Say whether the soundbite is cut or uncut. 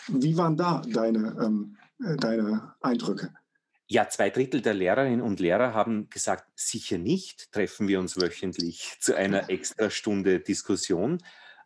uncut